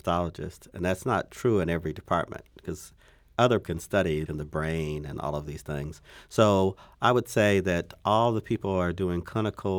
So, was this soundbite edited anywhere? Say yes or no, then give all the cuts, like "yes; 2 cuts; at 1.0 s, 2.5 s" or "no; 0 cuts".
yes; 2 cuts; at 3.6 s, 4.3 s